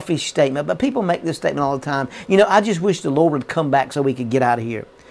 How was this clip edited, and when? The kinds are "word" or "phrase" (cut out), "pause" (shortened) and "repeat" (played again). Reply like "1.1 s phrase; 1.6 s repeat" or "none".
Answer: none